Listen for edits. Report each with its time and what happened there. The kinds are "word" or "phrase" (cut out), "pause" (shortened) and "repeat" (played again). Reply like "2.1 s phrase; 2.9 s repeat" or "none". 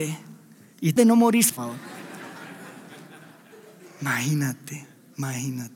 1.0 s word; 1.5 s phrase